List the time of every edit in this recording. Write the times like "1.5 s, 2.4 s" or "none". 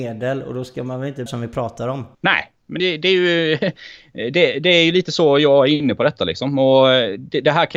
1.3 s, 2.1 s, 2.8 s